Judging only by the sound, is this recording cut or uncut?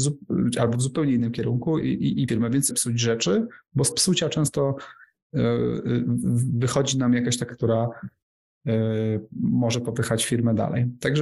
cut